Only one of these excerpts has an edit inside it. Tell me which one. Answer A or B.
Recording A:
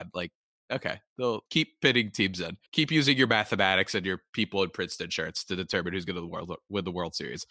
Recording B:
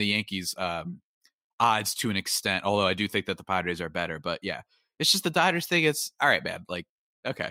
A